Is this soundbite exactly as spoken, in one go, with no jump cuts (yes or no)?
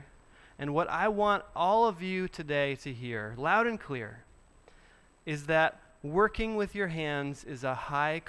yes